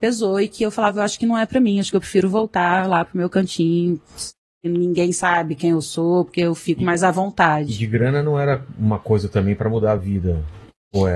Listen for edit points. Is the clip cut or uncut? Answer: uncut